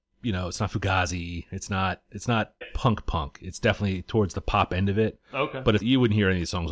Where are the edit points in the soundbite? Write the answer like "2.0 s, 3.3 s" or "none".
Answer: 2.6 s, 5.8 s